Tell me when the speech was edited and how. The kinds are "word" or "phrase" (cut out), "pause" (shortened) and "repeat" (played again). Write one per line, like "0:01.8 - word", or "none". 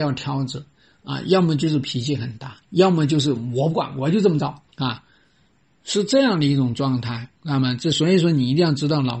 0:02.6 - pause
0:04.7 - pause
0:07.4 - pause